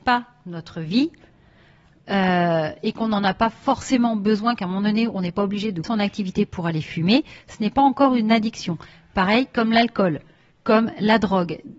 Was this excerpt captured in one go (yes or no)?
no